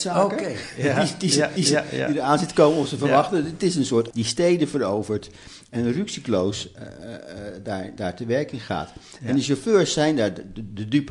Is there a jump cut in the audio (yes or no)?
yes